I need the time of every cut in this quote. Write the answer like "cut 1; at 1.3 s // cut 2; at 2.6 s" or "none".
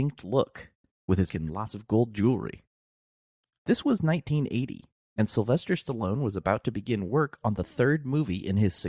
cut 1; at 1.3 s